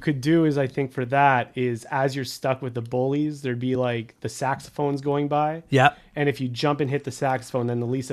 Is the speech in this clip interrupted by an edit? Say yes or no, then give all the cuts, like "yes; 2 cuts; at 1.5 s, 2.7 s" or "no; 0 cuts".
no; 0 cuts